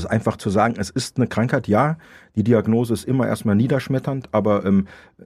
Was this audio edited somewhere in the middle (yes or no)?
no